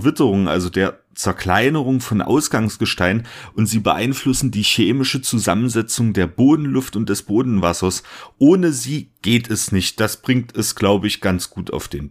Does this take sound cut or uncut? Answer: uncut